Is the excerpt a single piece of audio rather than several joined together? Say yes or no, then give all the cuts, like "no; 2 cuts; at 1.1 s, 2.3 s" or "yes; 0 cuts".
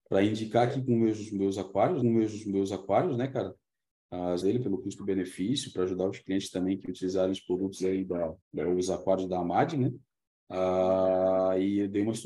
no; 3 cuts; at 2.0 s, 4.4 s, 8.4 s